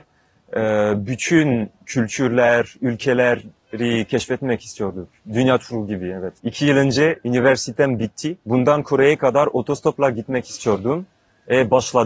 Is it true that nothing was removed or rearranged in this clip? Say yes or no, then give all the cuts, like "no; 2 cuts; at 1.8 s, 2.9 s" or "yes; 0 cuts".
no; 1 cut; at 6.4 s